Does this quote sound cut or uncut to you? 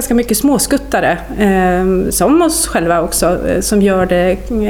uncut